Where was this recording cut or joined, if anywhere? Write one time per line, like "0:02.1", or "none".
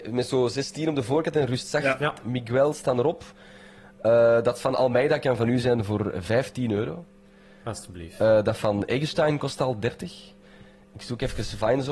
none